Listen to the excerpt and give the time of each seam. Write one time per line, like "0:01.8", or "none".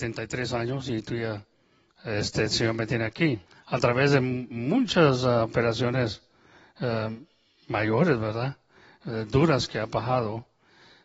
0:03.5